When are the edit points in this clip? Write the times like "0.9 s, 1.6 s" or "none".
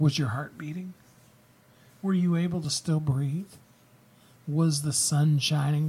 none